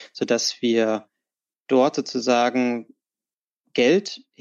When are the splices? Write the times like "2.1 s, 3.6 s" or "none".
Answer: none